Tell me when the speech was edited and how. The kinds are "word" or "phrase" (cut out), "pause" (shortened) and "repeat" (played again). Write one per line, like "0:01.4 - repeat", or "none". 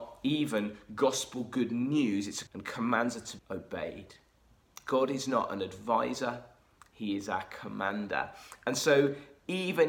0:02.5 - word
0:03.4 - word